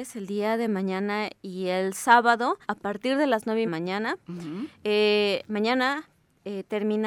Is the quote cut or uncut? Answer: cut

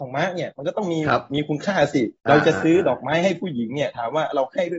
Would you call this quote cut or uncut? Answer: cut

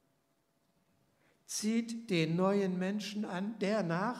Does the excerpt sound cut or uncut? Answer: uncut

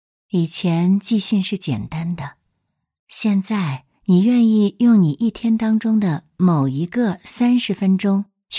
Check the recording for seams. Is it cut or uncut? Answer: cut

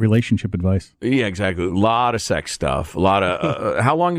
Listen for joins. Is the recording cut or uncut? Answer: uncut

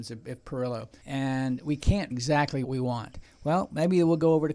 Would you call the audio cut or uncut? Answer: cut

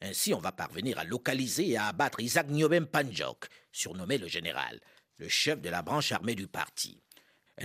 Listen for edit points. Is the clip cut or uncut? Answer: uncut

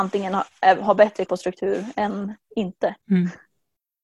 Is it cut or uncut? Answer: cut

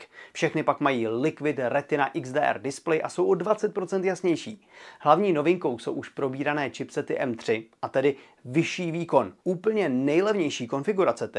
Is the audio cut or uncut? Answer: cut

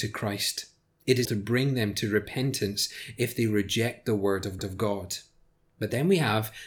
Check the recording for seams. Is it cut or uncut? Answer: cut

